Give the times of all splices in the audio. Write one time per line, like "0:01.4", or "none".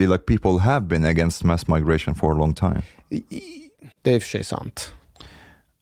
0:03.9